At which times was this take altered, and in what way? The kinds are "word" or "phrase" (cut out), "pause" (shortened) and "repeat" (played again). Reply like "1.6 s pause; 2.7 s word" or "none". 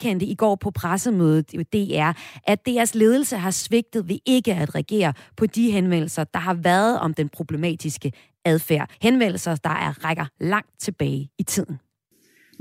8.9 s pause